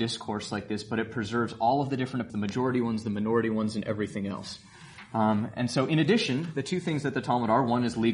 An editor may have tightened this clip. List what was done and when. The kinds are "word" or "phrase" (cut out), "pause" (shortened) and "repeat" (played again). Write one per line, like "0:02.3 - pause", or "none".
0:02.3 - word